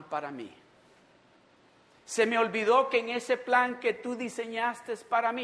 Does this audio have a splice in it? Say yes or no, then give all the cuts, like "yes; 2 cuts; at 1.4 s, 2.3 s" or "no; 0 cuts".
no; 0 cuts